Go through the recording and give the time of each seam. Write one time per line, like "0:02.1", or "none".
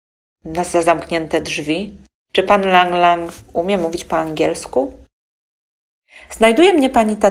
none